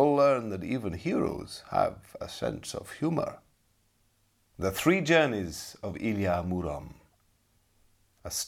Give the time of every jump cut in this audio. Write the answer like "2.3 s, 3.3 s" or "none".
4.1 s